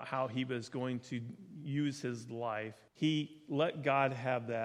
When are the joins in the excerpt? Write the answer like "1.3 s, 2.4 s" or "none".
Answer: 2.9 s